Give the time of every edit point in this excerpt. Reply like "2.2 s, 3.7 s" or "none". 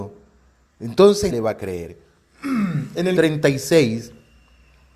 1.3 s, 3.2 s